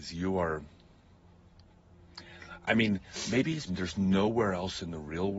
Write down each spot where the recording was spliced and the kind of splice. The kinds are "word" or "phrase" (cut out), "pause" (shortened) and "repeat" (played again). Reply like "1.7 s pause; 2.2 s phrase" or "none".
3.7 s word